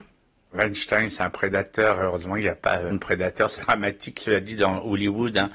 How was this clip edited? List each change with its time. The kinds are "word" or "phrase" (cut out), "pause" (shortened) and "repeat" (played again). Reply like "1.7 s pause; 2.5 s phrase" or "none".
2.9 s word; 3.6 s word